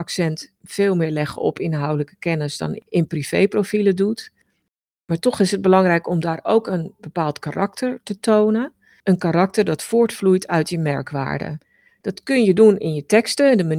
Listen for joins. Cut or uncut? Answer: uncut